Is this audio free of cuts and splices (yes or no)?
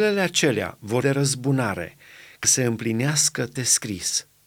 no